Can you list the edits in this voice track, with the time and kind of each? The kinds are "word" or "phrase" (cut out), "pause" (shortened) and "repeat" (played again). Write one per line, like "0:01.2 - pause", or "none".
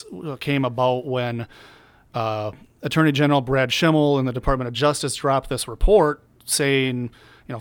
none